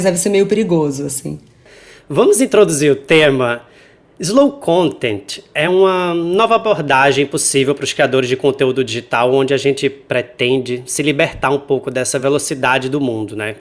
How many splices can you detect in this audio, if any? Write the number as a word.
zero